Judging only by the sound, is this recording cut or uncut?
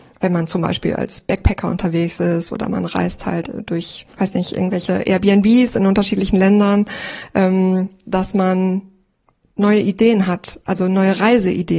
cut